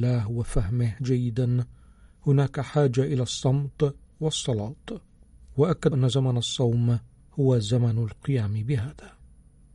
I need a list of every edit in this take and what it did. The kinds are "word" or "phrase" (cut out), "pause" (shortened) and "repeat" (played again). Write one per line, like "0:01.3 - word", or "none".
0:05.9 - word